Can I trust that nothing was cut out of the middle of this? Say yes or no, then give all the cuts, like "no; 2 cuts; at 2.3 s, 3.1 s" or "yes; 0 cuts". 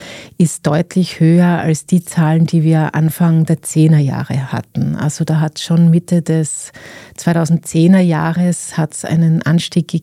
yes; 0 cuts